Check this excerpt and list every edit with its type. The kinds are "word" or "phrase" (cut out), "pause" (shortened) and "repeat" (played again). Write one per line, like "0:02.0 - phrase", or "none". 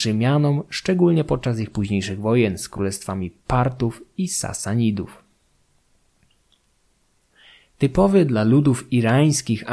none